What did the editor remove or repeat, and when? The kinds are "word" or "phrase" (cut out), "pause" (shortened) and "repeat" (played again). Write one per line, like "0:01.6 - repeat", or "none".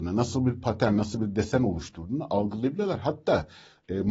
none